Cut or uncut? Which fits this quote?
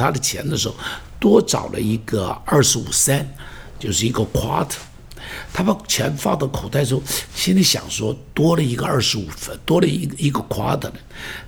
cut